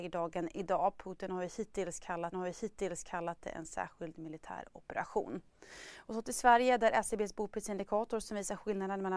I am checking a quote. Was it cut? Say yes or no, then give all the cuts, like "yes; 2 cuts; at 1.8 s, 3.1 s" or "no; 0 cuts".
yes; 1 cut; at 2.3 s